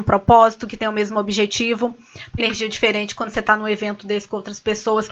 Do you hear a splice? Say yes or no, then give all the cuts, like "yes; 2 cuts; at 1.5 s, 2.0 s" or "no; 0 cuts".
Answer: yes; 1 cut; at 2.4 s